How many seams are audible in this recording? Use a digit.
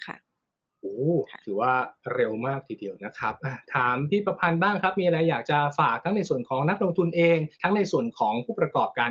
1